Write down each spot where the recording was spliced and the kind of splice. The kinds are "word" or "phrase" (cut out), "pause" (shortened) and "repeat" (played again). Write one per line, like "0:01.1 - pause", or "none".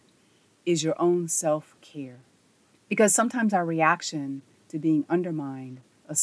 0:02.7 - pause